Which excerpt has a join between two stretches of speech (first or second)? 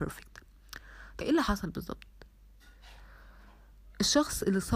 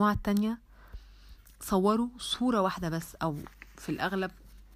first